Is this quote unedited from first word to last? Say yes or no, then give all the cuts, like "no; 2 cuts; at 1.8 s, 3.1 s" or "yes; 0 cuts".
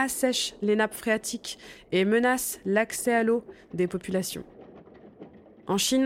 yes; 0 cuts